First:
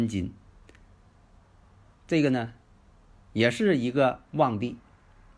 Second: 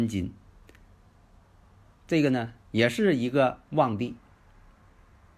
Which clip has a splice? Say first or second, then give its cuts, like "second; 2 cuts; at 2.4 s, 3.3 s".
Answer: second; 1 cut; at 2.6 s